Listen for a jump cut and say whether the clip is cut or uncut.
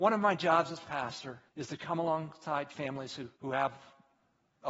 cut